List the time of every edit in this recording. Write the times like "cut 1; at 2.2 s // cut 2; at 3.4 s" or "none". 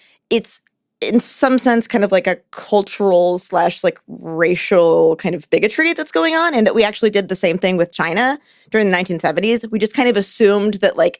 none